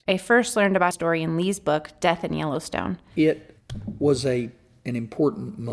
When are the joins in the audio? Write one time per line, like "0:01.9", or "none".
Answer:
0:00.9